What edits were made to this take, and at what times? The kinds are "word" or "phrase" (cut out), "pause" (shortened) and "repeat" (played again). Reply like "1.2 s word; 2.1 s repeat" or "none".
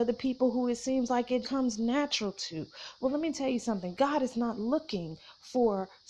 1.4 s word

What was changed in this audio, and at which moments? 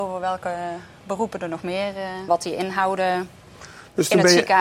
2.3 s phrase

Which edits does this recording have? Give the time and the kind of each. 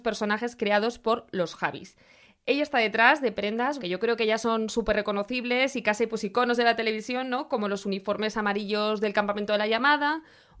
3.8 s word

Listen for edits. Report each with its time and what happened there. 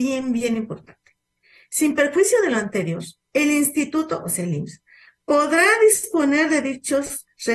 3.2 s pause

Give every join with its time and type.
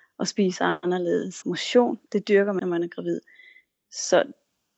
1.4 s word; 2.1 s word; 2.6 s word

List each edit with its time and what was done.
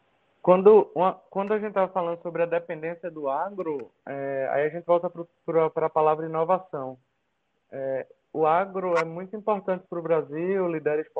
none

